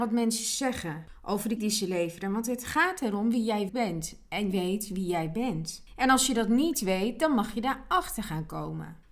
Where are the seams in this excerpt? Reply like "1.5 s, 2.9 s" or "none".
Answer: 1.6 s, 3.7 s, 4.5 s